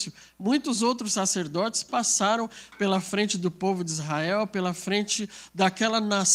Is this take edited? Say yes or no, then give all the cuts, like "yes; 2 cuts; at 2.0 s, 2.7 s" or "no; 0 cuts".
no; 0 cuts